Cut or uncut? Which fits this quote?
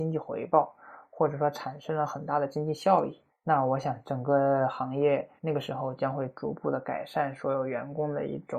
cut